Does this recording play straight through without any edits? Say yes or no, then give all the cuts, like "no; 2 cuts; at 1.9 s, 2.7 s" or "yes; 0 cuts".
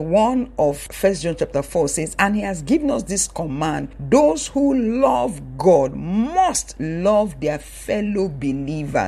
yes; 0 cuts